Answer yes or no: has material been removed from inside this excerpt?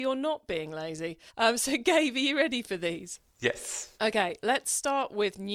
yes